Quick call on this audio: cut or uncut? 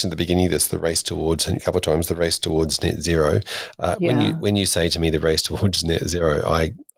cut